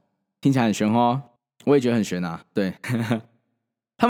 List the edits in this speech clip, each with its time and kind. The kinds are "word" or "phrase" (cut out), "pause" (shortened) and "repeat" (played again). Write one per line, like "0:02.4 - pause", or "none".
0:01.4 - pause